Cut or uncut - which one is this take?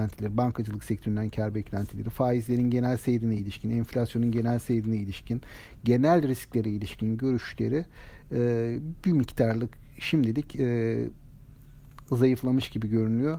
uncut